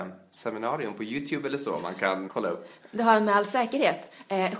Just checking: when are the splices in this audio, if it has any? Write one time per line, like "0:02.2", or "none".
0:02.3